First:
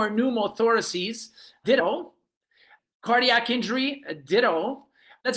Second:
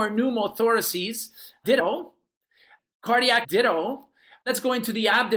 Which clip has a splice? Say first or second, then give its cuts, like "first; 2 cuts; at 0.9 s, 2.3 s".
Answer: second; 1 cut; at 3.4 s